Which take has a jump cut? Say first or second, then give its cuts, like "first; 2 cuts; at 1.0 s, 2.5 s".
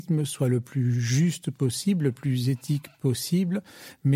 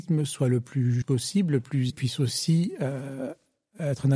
second; 2 cuts; at 1.0 s, 1.9 s